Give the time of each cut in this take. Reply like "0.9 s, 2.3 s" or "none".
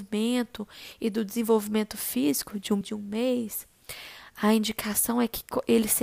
2.8 s